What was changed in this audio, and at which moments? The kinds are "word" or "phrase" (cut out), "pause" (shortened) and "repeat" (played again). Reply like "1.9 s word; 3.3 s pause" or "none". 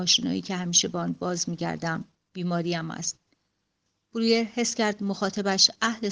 none